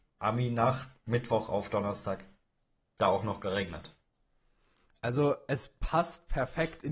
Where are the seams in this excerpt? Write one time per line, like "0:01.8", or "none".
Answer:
none